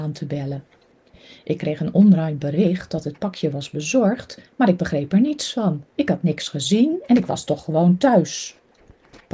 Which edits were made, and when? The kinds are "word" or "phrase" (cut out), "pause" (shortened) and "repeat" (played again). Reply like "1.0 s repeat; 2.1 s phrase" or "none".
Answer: 5.9 s pause